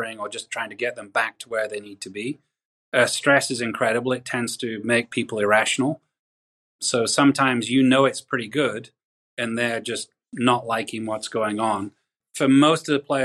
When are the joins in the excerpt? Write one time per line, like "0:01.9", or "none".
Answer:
none